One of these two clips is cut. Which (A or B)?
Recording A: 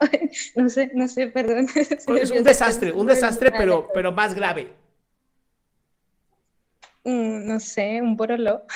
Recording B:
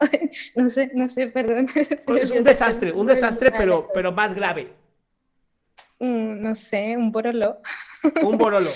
B